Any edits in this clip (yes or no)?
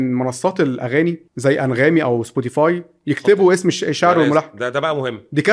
yes